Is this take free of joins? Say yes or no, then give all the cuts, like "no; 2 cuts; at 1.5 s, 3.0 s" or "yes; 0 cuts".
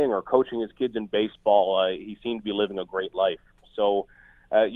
yes; 0 cuts